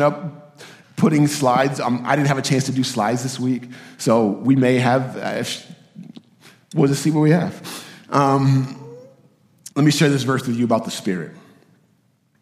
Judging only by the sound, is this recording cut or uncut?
cut